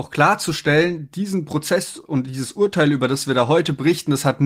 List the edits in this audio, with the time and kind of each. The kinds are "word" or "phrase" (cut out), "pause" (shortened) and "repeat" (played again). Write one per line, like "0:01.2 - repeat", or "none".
none